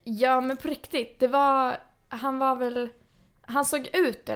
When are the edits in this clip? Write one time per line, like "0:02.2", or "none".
none